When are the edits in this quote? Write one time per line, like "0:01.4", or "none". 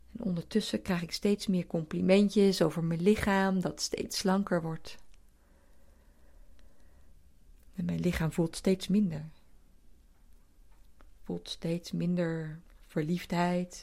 none